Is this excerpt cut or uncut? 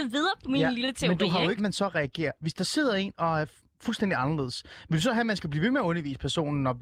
cut